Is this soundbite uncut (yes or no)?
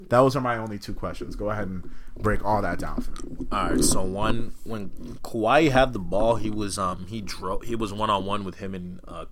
yes